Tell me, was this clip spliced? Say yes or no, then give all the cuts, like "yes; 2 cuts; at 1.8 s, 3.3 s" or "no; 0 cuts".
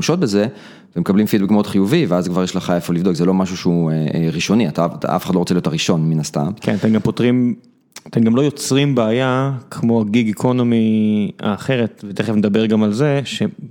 no; 0 cuts